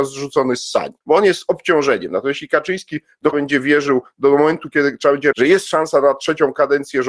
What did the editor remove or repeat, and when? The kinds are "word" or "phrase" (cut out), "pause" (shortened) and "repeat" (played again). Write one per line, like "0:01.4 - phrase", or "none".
0:01.0 - pause
0:03.3 - word
0:05.3 - phrase